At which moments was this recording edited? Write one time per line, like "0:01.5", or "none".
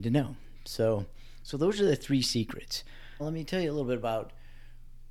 0:03.2